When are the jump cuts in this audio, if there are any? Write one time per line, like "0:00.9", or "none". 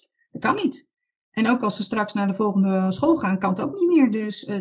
none